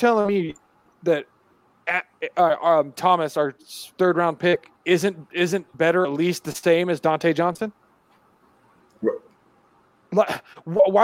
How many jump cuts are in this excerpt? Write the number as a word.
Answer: two